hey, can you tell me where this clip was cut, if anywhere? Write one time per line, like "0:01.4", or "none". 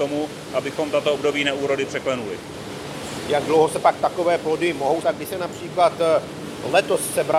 0:05.0